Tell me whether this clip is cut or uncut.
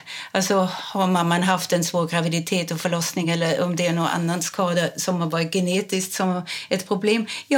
uncut